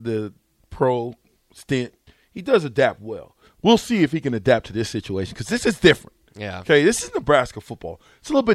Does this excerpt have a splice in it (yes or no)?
no